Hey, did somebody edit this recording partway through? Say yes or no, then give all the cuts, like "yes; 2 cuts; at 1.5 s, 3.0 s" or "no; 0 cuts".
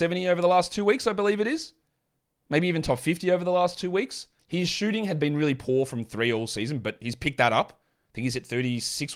yes; 1 cut; at 4.4 s